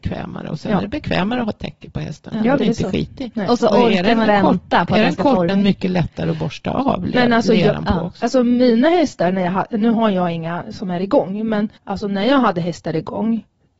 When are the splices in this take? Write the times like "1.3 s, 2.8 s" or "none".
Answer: 2.6 s, 3.6 s, 4.3 s, 5.5 s, 11.8 s